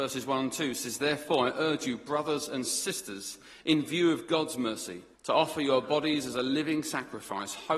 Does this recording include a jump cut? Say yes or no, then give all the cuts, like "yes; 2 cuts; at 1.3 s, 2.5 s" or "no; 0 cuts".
yes; 1 cut; at 5.1 s